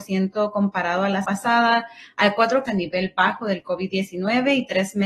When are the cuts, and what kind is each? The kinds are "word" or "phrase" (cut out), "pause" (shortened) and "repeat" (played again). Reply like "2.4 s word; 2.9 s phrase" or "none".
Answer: 1.2 s word; 2.7 s phrase

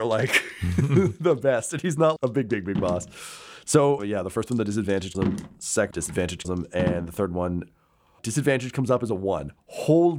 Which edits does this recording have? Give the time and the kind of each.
2.2 s word; 4.0 s word; 5.1 s word; 5.9 s word; 6.4 s word; 8.2 s word

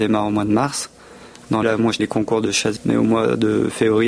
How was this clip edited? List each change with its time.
1.6 s word; 2.0 s word; 2.8 s phrase

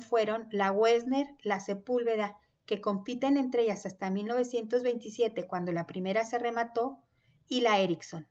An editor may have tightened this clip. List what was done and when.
none

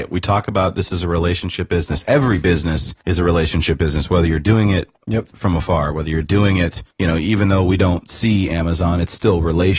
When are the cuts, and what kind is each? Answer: 3.0 s pause; 5.0 s pause; 6.9 s pause

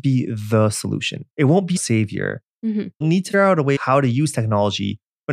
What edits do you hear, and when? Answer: 1.3 s pause; 1.8 s word; 3.0 s word; 3.3 s word; 3.8 s word

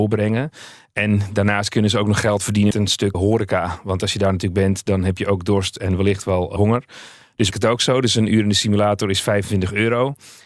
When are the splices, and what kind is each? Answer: 2.7 s word; 3.1 s word; 6.6 s word; 7.5 s phrase

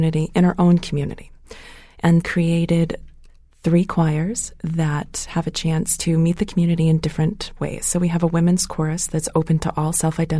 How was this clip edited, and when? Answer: 2.2 s phrase

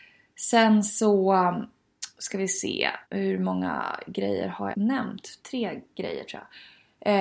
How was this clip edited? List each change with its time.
3.0 s pause; 4.7 s word; 5.4 s pause

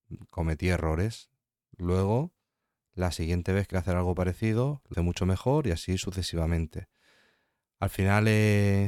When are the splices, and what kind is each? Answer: 3.7 s word; 4.9 s word

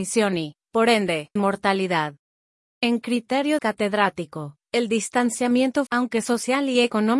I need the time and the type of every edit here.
1.4 s word; 3.6 s word; 5.9 s word

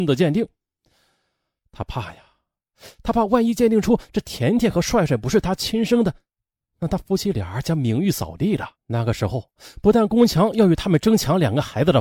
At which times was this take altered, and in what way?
8.7 s pause

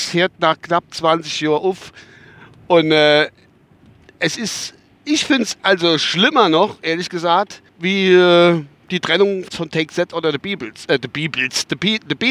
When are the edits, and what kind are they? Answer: 7.7 s pause; 9.5 s word

